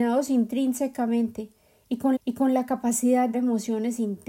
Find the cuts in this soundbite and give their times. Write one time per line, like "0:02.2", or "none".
0:02.2
0:03.3